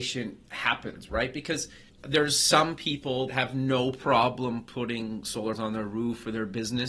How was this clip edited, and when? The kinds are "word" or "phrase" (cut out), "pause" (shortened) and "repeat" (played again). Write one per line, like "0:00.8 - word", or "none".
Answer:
0:01.9 - word
0:03.3 - word
0:05.6 - word